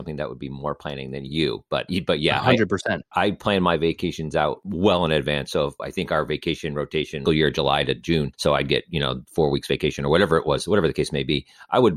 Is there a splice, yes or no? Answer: yes